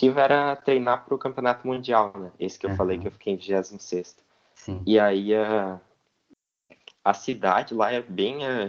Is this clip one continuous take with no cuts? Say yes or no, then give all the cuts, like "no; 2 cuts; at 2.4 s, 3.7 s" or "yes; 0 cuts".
yes; 0 cuts